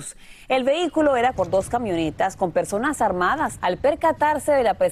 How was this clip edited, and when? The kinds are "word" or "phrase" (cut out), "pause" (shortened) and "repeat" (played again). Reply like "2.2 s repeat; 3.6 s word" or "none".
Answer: 1.3 s word; 3.6 s word